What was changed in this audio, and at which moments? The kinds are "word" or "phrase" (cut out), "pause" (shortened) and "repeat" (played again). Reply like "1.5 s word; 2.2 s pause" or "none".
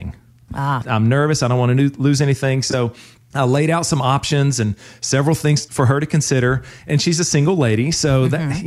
none